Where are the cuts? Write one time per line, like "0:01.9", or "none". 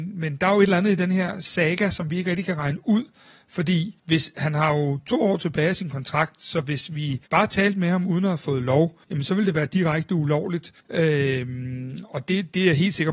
0:04.0
0:07.3
0:09.0
0:10.8